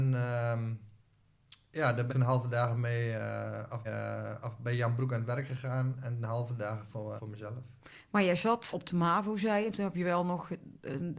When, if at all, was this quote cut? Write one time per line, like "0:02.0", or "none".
0:02.1
0:03.8
0:07.2
0:08.7